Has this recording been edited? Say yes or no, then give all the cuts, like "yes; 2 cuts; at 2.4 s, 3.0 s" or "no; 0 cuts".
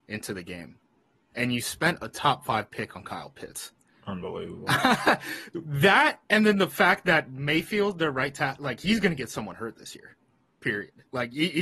no; 0 cuts